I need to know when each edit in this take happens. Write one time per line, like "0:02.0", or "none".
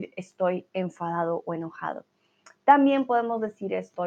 none